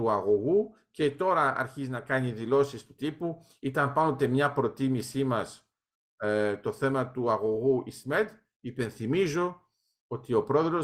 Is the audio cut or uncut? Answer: uncut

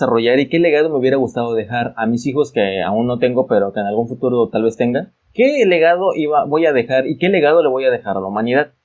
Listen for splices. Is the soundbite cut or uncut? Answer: cut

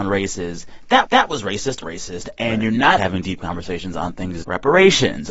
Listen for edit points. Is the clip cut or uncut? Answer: cut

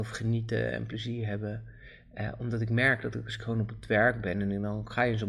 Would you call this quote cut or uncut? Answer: uncut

